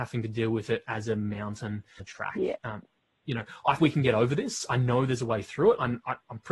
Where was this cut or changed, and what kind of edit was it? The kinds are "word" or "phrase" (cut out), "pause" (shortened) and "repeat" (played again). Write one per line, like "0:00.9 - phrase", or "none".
0:02.0 - word
0:03.8 - word